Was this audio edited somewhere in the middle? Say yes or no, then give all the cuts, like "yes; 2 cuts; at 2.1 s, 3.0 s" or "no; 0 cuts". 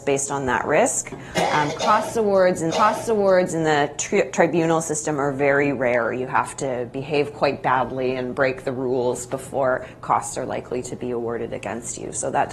yes; 1 cut; at 2.7 s